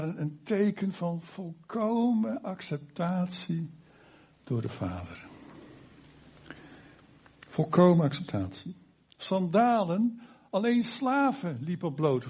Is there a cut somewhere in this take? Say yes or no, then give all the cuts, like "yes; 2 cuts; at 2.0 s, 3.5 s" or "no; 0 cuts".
no; 0 cuts